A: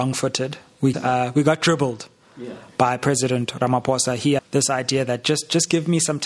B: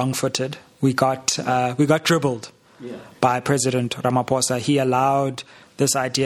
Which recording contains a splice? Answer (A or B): A